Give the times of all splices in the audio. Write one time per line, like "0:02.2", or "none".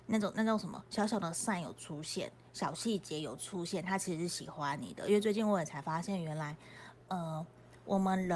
none